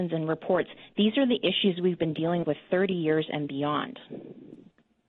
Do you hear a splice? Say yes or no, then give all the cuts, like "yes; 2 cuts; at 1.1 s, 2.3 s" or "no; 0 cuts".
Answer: yes; 1 cut; at 2.4 s